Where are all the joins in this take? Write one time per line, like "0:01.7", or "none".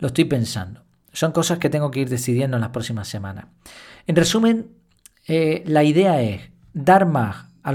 none